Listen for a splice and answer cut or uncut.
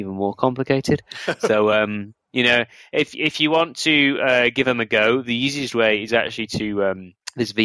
uncut